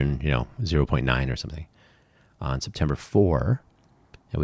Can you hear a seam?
no; 0 cuts

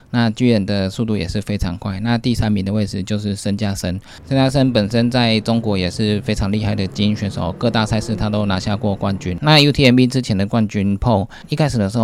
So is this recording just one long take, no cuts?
yes; 0 cuts

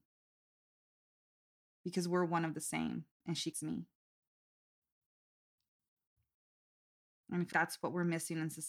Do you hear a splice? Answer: yes; 2 cuts; at 3.5 s, 7.5 s

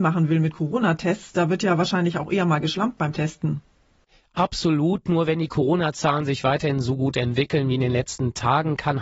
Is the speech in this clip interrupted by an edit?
no; 0 cuts

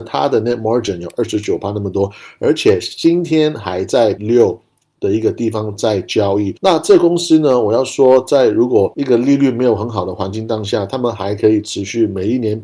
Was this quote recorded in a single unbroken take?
no; 1 cut; at 4.2 s

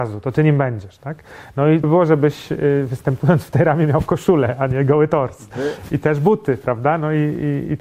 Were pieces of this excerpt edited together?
yes; 1 cut; at 1.8 s

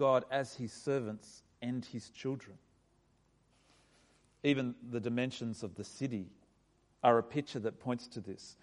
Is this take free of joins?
yes; 0 cuts

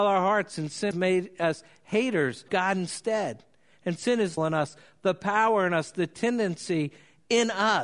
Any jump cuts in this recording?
yes; 3 cuts; at 0.9 s, 2.5 s, 4.4 s

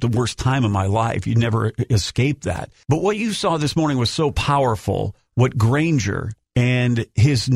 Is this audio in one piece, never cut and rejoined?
yes; 0 cuts

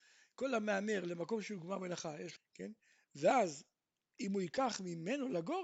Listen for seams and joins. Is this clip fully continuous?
no; 1 cut; at 2.4 s

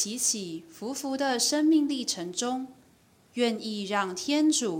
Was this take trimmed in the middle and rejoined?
no; 0 cuts

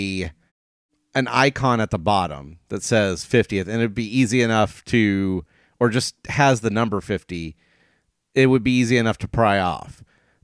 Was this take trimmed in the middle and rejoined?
no; 0 cuts

